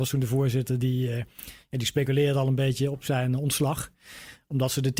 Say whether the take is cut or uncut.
uncut